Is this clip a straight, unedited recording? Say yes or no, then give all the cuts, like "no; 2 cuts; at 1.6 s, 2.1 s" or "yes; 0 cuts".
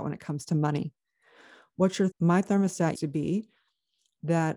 no; 2 cuts; at 2.1 s, 2.9 s